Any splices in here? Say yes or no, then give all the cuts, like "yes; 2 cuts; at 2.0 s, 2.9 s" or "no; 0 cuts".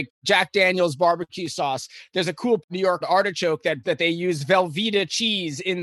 yes; 3 cuts; at 2.6 s, 3.0 s, 3.8 s